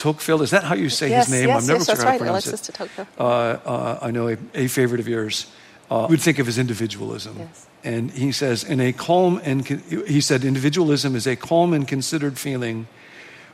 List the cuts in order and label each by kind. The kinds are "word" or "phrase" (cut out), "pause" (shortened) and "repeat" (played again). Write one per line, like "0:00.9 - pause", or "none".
0:01.9 - word
0:06.1 - phrase
0:07.7 - pause